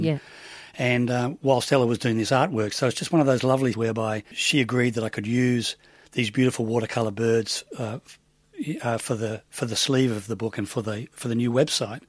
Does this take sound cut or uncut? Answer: cut